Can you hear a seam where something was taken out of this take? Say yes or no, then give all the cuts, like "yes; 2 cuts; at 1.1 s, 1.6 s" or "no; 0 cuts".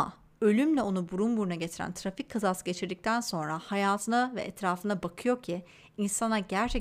no; 0 cuts